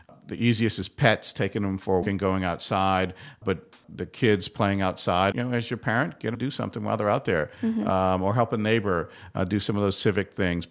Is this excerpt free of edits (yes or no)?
no